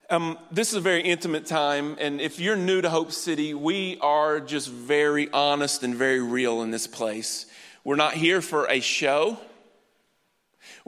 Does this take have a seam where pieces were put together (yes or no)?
no